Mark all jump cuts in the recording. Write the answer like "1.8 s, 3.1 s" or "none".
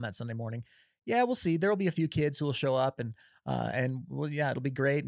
none